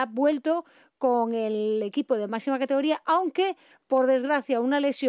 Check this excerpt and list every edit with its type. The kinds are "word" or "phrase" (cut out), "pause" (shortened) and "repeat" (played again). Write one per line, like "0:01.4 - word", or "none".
none